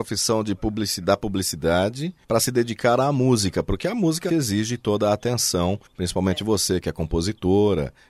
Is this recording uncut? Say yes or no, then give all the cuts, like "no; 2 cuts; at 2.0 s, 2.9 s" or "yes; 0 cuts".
no; 3 cuts; at 2.2 s, 4.3 s, 5.9 s